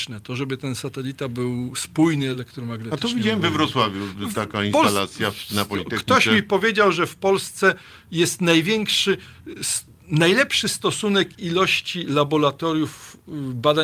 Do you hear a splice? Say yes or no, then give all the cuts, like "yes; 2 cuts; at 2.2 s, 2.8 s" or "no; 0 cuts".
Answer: no; 0 cuts